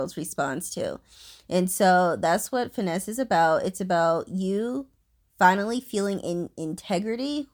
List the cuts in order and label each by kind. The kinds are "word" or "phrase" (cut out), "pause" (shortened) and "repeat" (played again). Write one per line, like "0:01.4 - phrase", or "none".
none

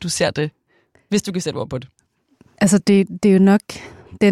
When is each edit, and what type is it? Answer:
none

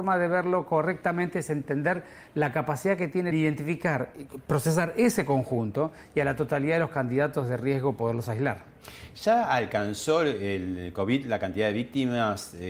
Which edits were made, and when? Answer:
0:03.3 - phrase

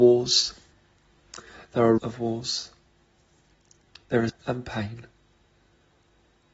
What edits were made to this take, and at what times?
0:02.0 - word
0:04.3 - word

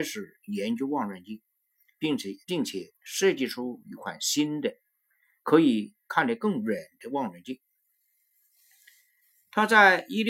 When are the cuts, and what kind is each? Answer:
0:02.4 - pause

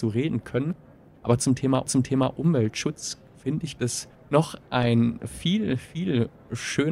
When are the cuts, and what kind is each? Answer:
0:01.9 - repeat
0:03.8 - word

